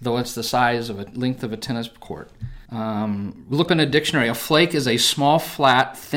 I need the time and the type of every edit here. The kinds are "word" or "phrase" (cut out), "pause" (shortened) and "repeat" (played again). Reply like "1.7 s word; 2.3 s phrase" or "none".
2.7 s pause; 3.7 s word